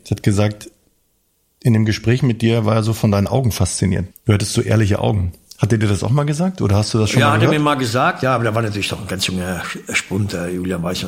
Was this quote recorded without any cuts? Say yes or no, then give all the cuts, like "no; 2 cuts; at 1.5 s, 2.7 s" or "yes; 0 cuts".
no; 1 cut; at 4.1 s